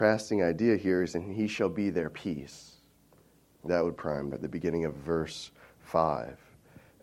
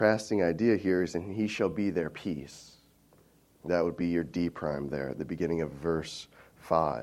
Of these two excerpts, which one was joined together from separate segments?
first; 2 cuts; at 4.0 s, 4.3 s

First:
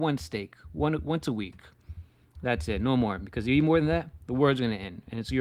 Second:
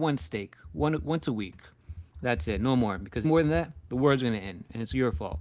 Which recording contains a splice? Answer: second; 2 cuts; at 2.1 s, 3.2 s

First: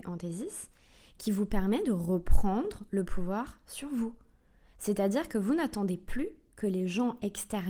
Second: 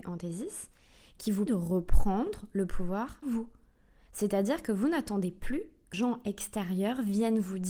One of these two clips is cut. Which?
second; 3 cuts; at 1.5 s, 3.2 s, 5.9 s

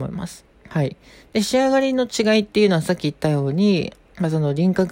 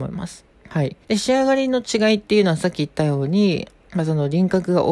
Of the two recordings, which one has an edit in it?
second; 1 cut; at 1.0 s

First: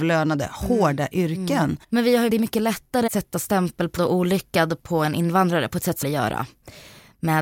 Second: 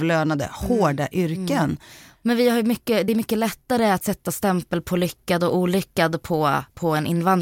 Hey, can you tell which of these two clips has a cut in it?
first; 6 cuts; at 1.8 s, 2.3 s, 3.1 s, 4.0 s, 4.8 s, 6.0 s

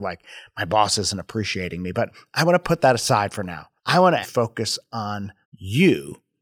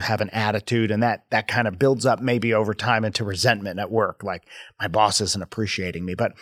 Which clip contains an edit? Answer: first; 3 cuts; at 3.8 s, 4.2 s, 5.4 s

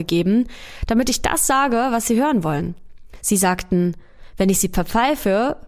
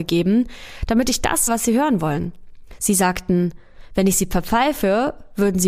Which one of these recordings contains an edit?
second; 1 cut; at 1.5 s

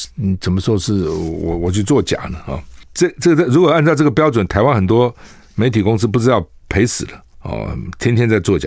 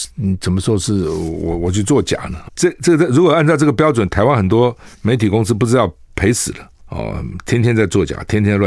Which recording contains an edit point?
second; 2 cuts; at 2.5 s, 4.9 s

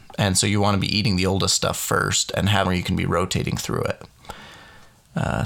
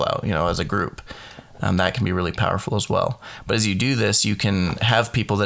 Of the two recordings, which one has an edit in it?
first; 1 cut; at 2.6 s

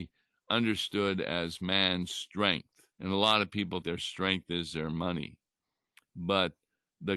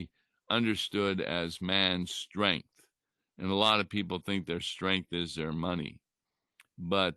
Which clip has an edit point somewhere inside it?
first; 2 cuts; at 2.9 s, 3.8 s

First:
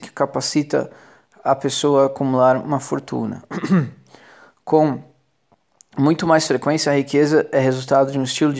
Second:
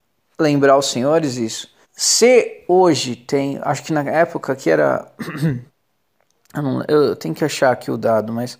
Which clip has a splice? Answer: second; 2 cuts; at 1.8 s, 5.7 s

